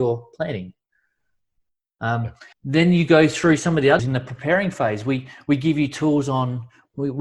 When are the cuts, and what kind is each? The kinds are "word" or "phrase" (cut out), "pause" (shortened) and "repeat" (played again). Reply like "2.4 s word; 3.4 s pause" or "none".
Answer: 2.5 s pause; 4.0 s word